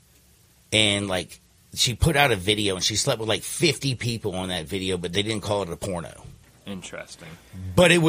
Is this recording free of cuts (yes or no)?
no